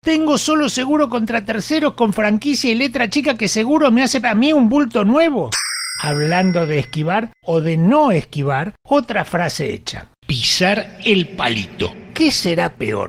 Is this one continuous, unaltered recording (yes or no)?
no